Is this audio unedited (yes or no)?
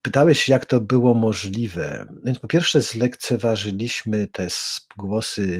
yes